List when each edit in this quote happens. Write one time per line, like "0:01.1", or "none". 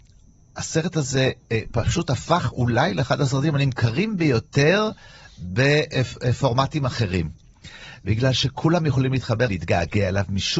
0:09.5